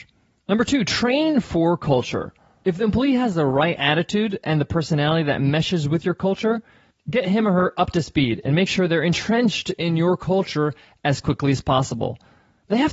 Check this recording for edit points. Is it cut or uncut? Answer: uncut